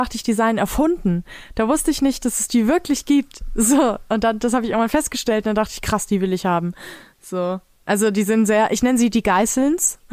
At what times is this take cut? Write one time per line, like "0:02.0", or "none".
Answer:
none